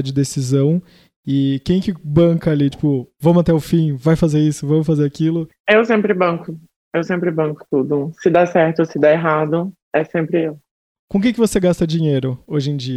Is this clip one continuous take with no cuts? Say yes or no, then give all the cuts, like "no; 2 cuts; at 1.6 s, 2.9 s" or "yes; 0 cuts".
yes; 0 cuts